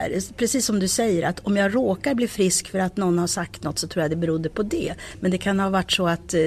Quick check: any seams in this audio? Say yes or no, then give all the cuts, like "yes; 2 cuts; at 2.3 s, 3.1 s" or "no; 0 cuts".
no; 0 cuts